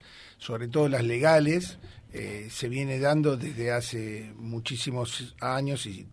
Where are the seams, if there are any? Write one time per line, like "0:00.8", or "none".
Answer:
none